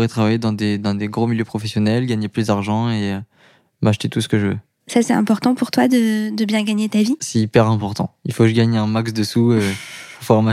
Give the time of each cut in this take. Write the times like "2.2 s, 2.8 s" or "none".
none